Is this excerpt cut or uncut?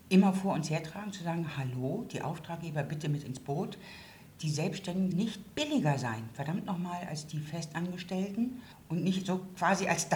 cut